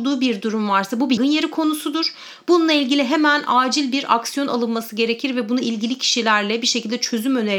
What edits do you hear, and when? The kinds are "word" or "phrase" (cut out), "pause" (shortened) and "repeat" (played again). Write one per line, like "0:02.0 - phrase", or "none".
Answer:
0:01.2 - word